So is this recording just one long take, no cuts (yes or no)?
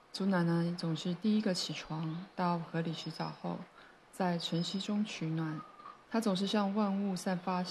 no